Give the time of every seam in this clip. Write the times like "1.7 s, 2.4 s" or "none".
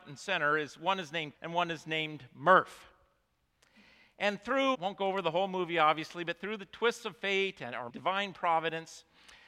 1.3 s, 4.7 s, 7.9 s